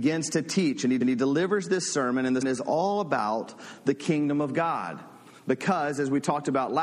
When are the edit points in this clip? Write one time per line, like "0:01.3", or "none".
0:01.0
0:02.4